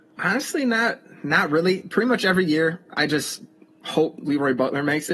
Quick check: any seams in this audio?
no; 0 cuts

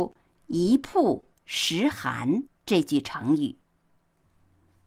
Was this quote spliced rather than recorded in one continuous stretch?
yes; 1 cut; at 2.5 s

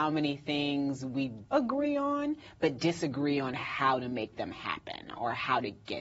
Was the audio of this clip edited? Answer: yes; 1 cut; at 1.5 s

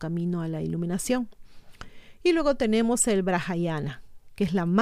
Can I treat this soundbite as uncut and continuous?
yes; 0 cuts

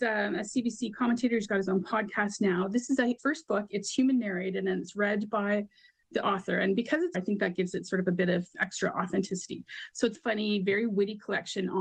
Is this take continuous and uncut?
no; 4 cuts; at 3.2 s, 7.1 s, 8.5 s, 10.1 s

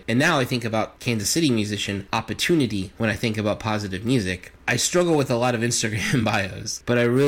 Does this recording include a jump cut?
no; 0 cuts

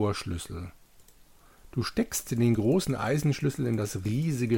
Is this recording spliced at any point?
no; 0 cuts

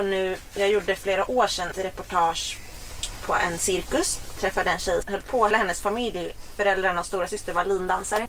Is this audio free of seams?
no; 4 cuts; at 1.0 s, 1.7 s, 5.0 s, 5.5 s

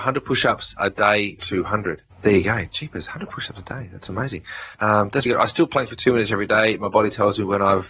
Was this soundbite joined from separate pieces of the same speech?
yes; 4 cuts; at 1.4 s, 2.1 s, 4.7 s, 5.3 s

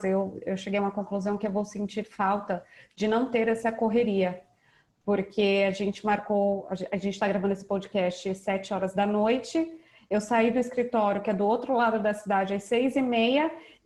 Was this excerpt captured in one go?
yes; 0 cuts

